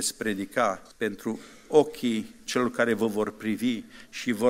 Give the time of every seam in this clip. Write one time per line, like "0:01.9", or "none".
0:00.9